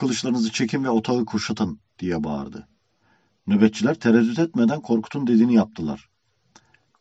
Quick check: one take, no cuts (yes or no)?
yes